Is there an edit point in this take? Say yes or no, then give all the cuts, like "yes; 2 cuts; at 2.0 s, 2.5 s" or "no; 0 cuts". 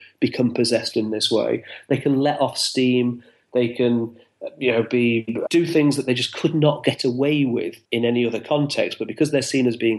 yes; 2 cuts; at 5.5 s, 7.8 s